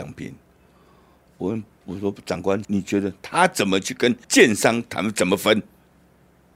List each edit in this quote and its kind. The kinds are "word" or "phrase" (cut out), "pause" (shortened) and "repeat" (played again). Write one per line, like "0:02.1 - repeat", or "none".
0:02.6 - phrase
0:04.2 - pause